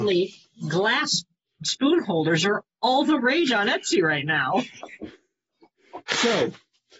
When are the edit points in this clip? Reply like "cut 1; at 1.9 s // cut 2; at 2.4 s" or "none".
none